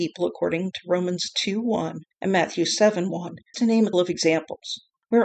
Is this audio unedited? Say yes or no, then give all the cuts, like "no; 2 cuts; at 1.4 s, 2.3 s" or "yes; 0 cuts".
no; 3 cuts; at 2.1 s, 3.5 s, 3.9 s